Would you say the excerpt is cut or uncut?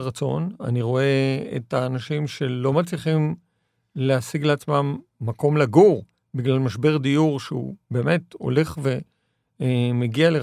uncut